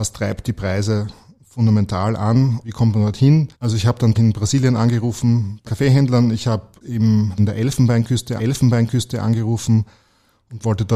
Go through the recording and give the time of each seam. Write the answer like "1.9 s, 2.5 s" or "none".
2.6 s, 3.5 s, 4.1 s, 5.7 s, 6.8 s, 7.4 s, 8.4 s

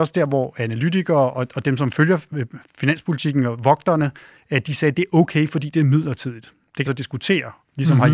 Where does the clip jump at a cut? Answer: 6.9 s

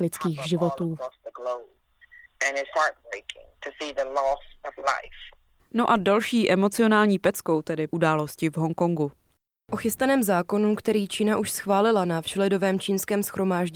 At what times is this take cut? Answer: 2.7 s, 3.5 s, 7.9 s

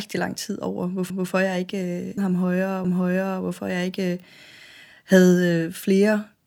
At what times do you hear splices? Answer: 1.1 s, 2.2 s, 2.8 s

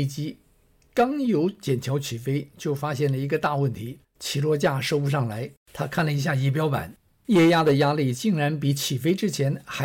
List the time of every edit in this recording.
4.0 s, 5.6 s, 7.1 s

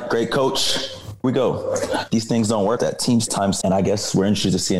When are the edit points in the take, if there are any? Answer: 1.2 s, 2.1 s, 2.8 s, 3.3 s, 3.6 s

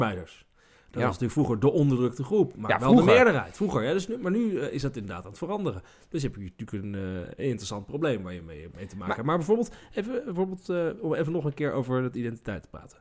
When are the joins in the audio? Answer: none

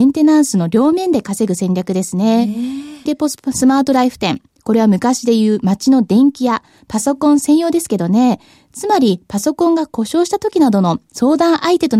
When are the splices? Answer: 3.1 s

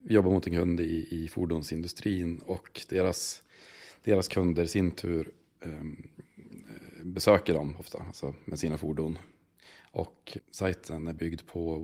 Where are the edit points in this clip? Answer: 10.4 s

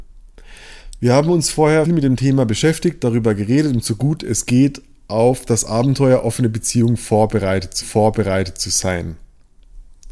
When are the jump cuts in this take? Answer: 1.9 s, 3.8 s, 7.8 s

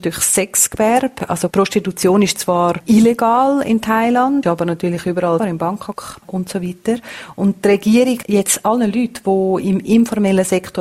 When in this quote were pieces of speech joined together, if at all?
4.4 s, 5.4 s, 6.2 s, 8.2 s

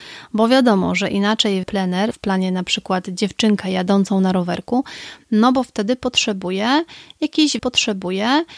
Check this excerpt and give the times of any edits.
1.6 s, 2.1 s, 7.6 s

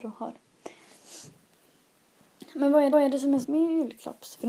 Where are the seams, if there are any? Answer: 2.9 s, 3.4 s

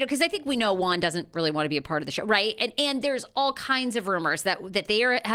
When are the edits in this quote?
none

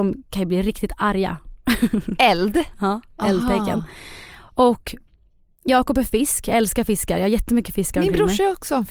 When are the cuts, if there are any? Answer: none

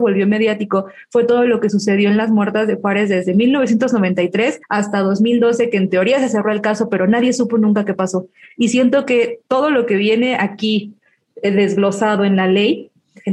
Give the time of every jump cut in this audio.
4.6 s

